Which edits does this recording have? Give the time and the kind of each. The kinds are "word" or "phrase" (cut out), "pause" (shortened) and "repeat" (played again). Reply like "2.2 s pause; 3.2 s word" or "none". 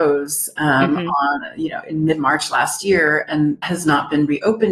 3.6 s word